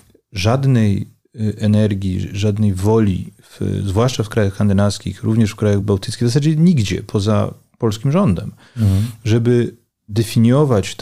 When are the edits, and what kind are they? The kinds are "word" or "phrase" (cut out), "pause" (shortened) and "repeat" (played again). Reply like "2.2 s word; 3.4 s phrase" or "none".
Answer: none